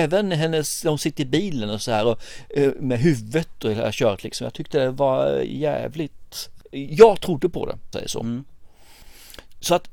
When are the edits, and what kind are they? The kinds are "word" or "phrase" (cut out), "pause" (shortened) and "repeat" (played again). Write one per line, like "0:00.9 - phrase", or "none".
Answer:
0:07.9 - word